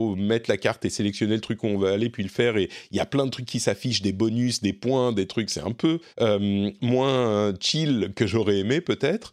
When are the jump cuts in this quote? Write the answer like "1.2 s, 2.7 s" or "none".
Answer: 6.1 s